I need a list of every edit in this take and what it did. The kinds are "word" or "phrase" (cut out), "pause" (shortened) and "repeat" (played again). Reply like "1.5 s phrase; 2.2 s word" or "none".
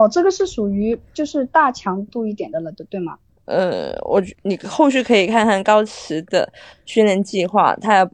3.3 s pause; 4.3 s pause